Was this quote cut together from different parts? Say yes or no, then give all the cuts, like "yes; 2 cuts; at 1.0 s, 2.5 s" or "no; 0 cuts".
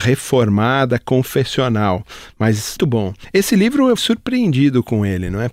yes; 2 cuts; at 2.8 s, 4.0 s